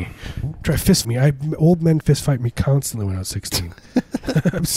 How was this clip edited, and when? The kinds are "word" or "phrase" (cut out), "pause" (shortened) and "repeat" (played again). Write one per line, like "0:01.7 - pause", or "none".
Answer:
0:01.0 - word
0:02.0 - phrase